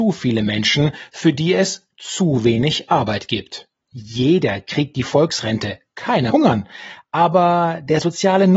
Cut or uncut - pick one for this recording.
cut